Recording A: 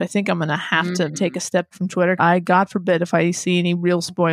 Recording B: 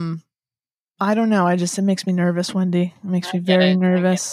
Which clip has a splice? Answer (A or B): A